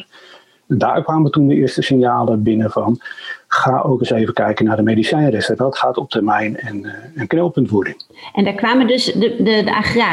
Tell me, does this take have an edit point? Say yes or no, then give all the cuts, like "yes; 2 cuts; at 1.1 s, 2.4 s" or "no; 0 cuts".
no; 0 cuts